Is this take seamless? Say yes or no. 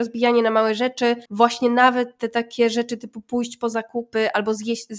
no